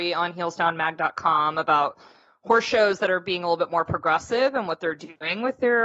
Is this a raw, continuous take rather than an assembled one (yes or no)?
yes